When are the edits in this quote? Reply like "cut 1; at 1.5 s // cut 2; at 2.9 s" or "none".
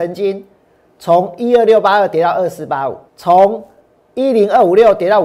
cut 1; at 3.1 s

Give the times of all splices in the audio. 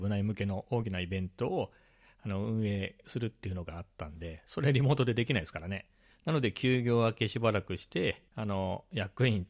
cut 1; at 8.3 s

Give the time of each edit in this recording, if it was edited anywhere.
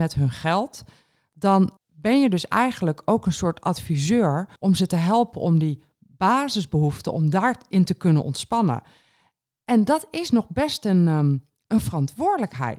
cut 1; at 1.8 s // cut 2; at 4.6 s

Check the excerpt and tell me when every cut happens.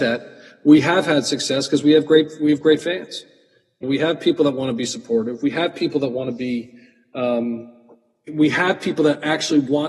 cut 1; at 3.8 s // cut 2; at 8.3 s

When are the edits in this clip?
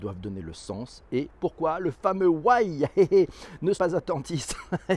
cut 1; at 1.3 s // cut 2; at 3.7 s

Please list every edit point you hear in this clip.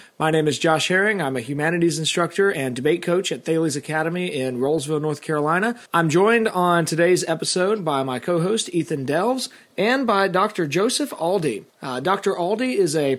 cut 1; at 5.9 s // cut 2; at 11.7 s

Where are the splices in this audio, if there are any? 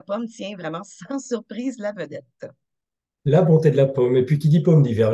none

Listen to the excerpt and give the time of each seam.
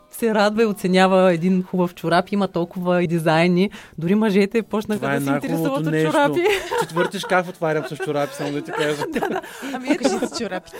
cut 1; at 1.9 s // cut 2; at 3.1 s

